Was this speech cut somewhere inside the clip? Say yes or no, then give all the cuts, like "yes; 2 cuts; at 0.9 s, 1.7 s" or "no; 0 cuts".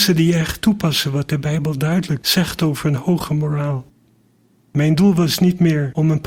no; 0 cuts